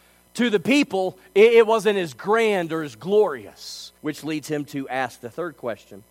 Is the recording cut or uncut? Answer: cut